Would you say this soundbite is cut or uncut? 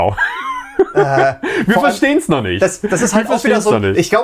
uncut